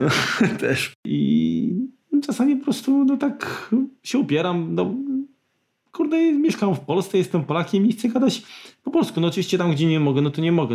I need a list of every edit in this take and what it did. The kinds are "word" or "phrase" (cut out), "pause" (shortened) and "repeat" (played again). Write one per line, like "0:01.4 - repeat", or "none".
none